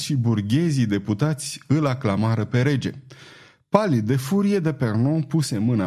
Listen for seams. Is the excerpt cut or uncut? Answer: uncut